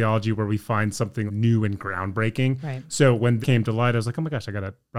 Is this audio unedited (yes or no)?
no